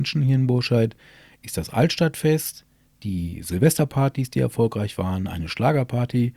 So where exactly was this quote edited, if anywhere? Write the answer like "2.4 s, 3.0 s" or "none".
none